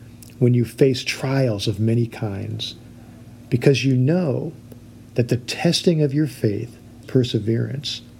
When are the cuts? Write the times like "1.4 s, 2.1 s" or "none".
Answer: 7.0 s